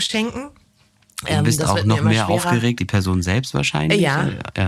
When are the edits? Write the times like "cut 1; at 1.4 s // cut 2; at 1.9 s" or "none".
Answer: cut 1; at 2.8 s